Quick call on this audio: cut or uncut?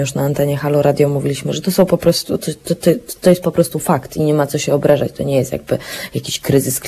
uncut